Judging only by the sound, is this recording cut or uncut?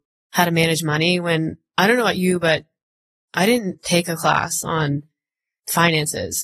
uncut